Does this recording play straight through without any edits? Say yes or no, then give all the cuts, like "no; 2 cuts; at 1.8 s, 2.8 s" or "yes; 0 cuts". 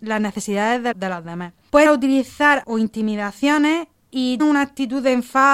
no; 4 cuts; at 0.9 s, 1.9 s, 2.6 s, 4.4 s